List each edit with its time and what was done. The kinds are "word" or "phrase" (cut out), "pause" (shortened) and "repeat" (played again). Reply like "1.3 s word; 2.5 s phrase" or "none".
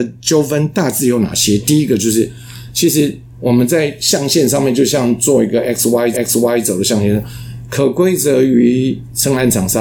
6.1 s repeat

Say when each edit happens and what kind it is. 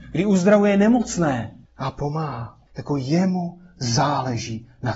1.6 s pause; 2.7 s pause

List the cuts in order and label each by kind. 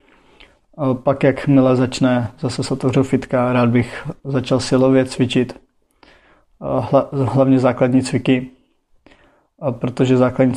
none

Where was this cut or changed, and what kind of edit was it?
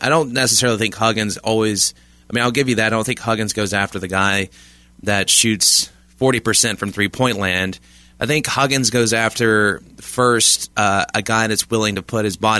none

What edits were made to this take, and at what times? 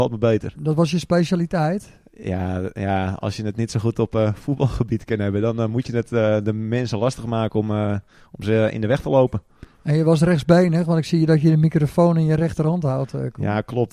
none

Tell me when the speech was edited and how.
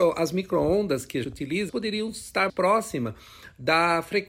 1.2 s word; 1.7 s word; 2.5 s word

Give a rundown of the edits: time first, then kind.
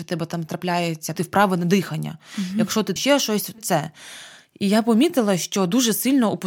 1.1 s phrase; 3.0 s word; 3.6 s phrase

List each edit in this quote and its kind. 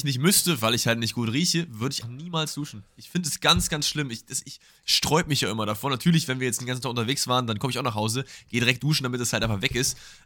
2.0 s word

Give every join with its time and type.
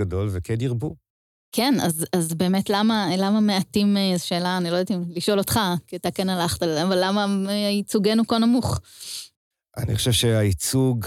none

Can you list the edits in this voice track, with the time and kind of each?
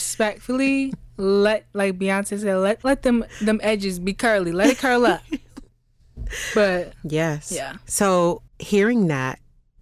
5.7 s pause; 8.5 s pause

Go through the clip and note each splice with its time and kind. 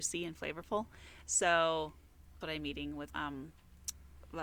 2.4 s word; 3.1 s word

